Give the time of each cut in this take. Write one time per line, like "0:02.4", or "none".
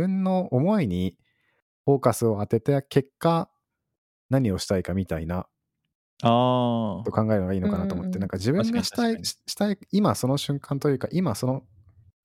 none

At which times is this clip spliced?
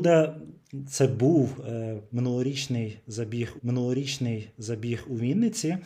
0:03.6

